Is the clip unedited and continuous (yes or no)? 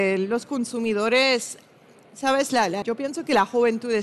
no